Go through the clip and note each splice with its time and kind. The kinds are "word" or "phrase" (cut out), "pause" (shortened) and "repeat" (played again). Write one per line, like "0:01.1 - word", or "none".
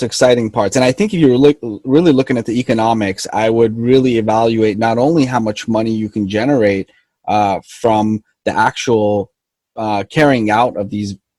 none